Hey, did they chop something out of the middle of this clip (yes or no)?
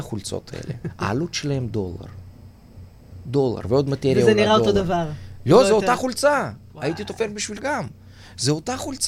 yes